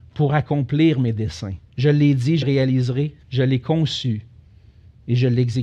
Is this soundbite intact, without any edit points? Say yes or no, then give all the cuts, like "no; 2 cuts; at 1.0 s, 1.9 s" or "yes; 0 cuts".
no; 3 cuts; at 1.7 s, 2.4 s, 3.2 s